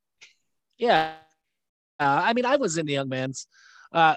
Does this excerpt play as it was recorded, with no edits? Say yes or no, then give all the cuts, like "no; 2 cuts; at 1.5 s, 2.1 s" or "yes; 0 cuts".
yes; 0 cuts